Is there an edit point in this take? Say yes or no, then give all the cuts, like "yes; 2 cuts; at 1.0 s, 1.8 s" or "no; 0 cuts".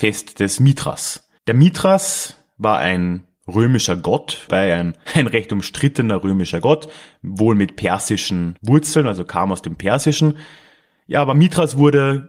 yes; 2 cuts; at 1.4 s, 5.0 s